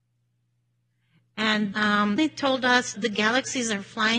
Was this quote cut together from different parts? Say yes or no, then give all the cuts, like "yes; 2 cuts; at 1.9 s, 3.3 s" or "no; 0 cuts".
yes; 3 cuts; at 1.7 s, 2.2 s, 2.9 s